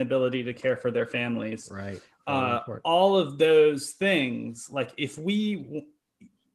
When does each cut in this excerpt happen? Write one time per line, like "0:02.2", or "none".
none